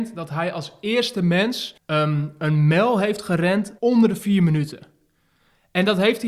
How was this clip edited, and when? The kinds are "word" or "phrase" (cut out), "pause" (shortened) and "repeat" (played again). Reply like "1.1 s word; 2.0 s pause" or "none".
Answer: 1.8 s pause; 3.8 s pause

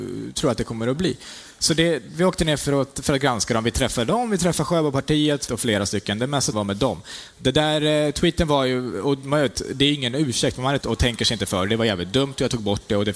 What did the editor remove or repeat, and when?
5.5 s word; 6.5 s word; 10.8 s word

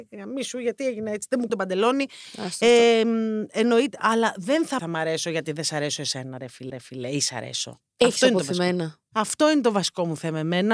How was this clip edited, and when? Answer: 1.5 s word; 4.8 s phrase; 6.7 s repeat

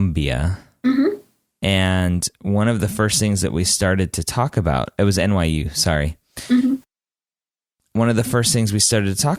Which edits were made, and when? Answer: none

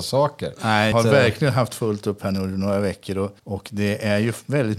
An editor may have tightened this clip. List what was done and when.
0.9 s word; 3.4 s pause

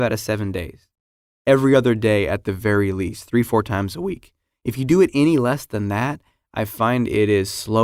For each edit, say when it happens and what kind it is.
none

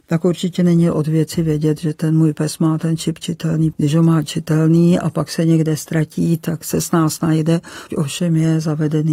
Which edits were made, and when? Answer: 3.7 s word; 7.9 s word

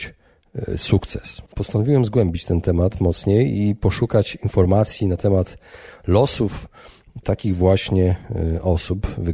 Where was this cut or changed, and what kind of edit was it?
1.5 s pause; 7.2 s word

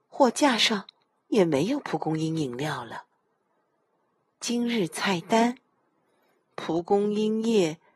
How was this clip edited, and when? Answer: none

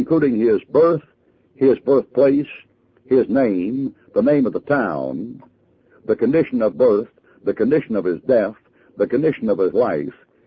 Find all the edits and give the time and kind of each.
6.7 s word

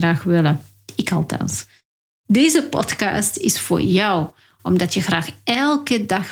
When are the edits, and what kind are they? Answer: none

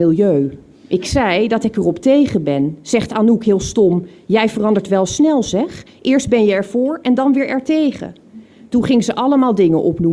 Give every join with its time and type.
none

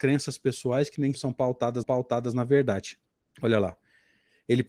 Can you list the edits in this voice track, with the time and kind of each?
1.1 s word; 1.8 s repeat; 3.1 s pause

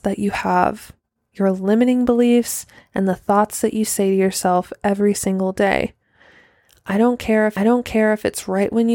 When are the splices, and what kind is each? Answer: 7.6 s repeat

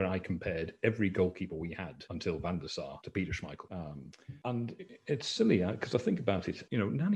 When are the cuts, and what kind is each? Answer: none

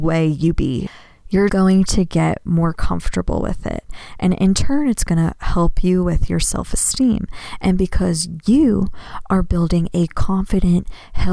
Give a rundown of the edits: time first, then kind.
1.5 s word

